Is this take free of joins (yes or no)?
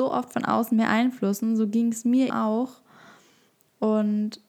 no